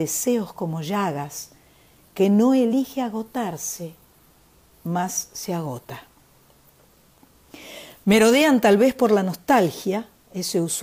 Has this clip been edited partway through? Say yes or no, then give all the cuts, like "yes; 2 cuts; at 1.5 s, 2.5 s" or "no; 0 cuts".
no; 0 cuts